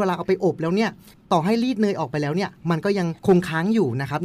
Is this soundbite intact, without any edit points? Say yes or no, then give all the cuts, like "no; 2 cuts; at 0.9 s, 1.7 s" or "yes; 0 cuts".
no; 1 cut; at 3.2 s